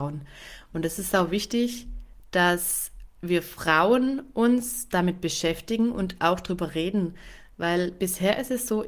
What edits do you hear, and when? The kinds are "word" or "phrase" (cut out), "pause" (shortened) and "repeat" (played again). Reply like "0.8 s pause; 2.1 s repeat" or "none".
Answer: 3.1 s pause